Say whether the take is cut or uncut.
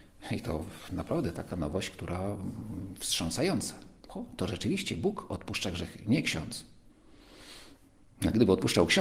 uncut